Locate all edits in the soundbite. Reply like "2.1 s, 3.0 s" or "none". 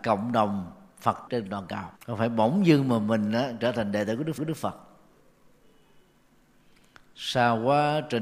1.3 s, 2.0 s, 4.4 s